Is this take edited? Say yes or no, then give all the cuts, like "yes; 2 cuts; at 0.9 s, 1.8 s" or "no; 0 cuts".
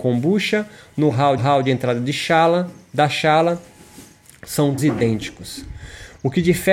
yes; 2 cuts; at 1.4 s, 4.8 s